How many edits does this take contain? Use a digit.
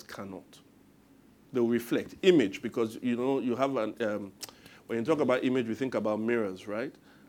0